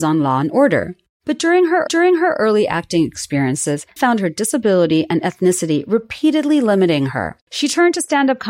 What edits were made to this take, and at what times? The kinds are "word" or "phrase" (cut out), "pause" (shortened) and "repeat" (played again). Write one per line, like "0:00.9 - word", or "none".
0:01.9 - repeat
0:04.0 - word
0:07.4 - pause